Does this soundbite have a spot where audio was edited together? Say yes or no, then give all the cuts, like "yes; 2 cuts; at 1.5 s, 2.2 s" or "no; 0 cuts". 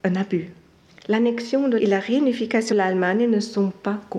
yes; 2 cuts; at 1.8 s, 2.7 s